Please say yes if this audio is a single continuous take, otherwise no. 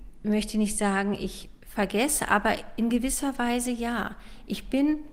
yes